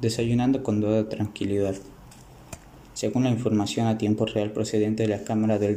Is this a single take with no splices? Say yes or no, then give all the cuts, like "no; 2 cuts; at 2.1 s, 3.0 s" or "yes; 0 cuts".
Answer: yes; 0 cuts